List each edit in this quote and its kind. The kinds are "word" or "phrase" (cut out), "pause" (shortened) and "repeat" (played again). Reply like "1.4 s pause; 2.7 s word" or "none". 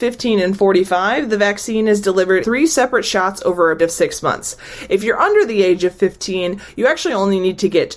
2.4 s word; 3.8 s word